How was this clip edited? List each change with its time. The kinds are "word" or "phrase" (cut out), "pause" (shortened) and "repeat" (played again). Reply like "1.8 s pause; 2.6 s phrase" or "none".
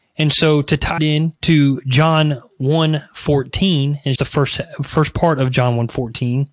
1.0 s word; 1.4 s pause; 4.2 s word